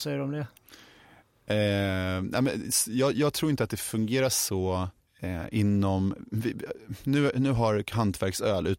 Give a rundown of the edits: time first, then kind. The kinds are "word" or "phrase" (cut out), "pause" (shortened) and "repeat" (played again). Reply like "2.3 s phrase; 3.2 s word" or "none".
5.0 s pause

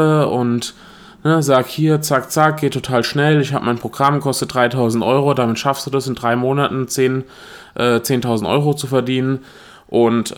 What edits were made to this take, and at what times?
none

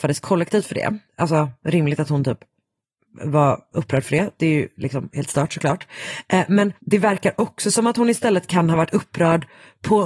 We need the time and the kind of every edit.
1.1 s pause; 6.8 s pause

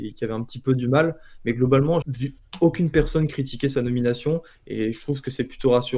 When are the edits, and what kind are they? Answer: 2.0 s word

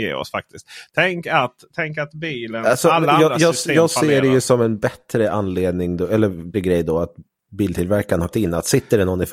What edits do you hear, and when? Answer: 6.5 s word; 8.3 s word

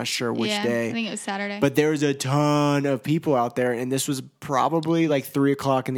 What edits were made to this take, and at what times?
none

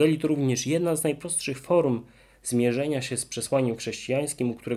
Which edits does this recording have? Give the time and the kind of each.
none

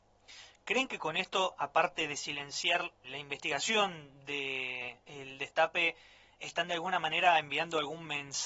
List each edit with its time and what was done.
3.0 s word; 5.0 s pause

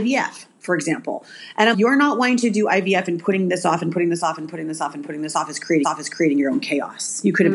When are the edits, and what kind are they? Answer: 1.7 s word; 5.8 s repeat

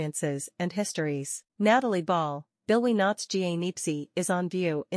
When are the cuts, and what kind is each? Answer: 1.5 s pause

